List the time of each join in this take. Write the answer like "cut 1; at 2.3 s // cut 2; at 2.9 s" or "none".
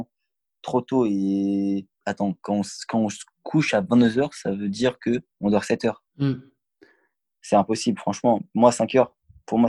cut 1; at 1.9 s // cut 2; at 5.3 s // cut 3; at 6.1 s